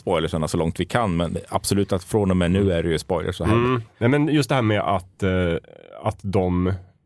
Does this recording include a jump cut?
no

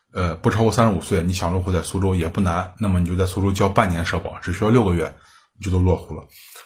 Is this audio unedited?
yes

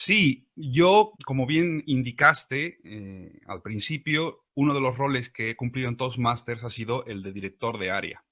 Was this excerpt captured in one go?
no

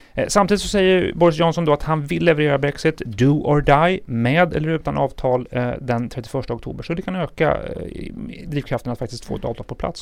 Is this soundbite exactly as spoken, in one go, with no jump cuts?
yes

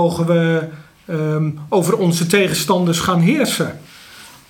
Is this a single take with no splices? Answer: yes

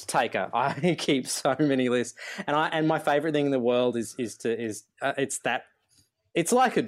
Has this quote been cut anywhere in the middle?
no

